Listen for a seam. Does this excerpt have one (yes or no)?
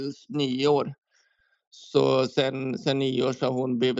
no